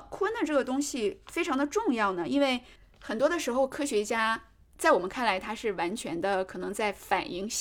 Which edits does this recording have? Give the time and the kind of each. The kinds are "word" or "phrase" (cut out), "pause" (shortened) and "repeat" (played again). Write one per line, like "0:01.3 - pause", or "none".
none